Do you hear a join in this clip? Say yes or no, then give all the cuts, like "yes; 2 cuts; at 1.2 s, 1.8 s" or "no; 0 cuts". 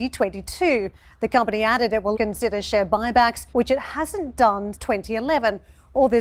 yes; 3 cuts; at 2.1 s, 3.5 s, 4.7 s